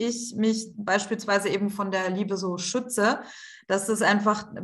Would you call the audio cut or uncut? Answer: uncut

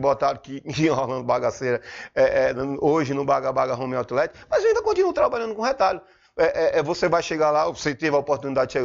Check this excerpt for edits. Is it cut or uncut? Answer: uncut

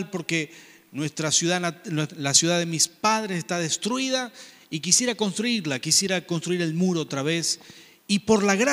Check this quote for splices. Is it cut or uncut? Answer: uncut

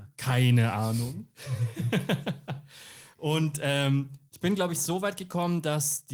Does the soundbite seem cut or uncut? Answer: uncut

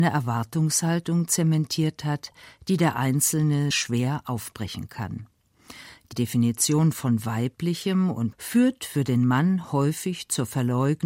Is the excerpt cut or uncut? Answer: cut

